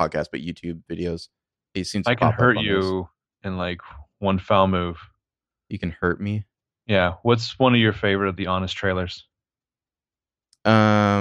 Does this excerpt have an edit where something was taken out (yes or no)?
no